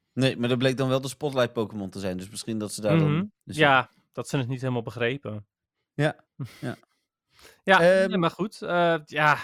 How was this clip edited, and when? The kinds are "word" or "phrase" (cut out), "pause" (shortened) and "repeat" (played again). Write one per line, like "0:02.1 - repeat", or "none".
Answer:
0:03.4 - pause
0:06.2 - pause